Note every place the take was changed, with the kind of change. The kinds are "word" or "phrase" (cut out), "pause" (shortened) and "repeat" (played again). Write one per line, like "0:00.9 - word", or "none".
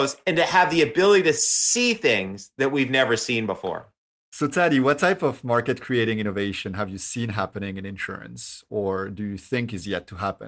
none